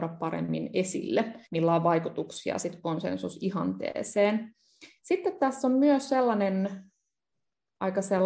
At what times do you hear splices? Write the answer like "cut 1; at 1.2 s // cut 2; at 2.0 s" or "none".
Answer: cut 1; at 1.5 s